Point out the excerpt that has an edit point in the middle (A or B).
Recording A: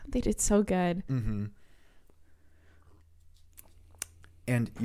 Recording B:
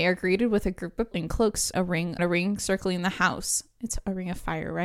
B